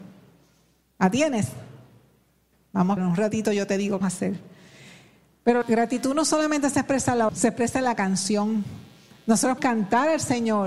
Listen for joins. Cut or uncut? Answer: cut